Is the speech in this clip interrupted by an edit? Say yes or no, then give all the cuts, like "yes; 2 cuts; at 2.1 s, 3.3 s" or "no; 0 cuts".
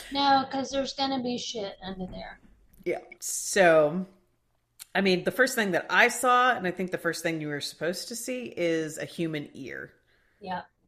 yes; 1 cut; at 3.2 s